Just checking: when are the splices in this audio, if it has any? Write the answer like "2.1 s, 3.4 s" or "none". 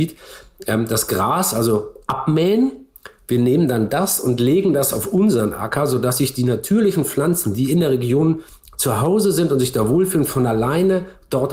none